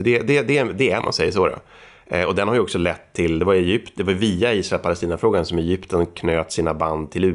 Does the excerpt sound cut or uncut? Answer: cut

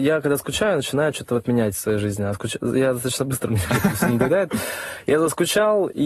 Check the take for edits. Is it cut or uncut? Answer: uncut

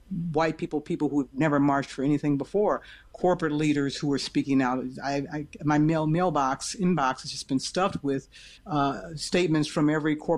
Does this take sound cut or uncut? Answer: cut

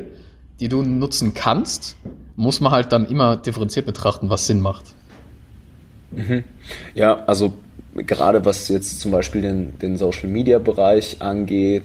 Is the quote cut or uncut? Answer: uncut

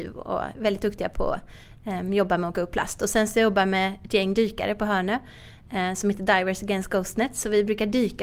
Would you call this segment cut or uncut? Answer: cut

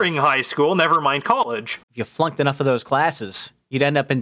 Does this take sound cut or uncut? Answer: cut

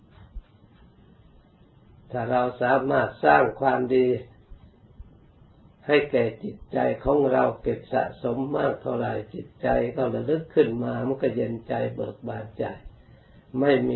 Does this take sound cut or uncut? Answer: uncut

